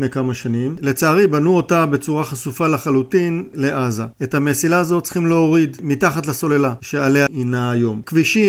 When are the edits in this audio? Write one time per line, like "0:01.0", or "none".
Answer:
0:07.3